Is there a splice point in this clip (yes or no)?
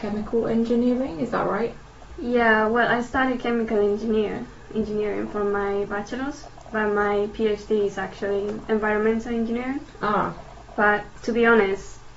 no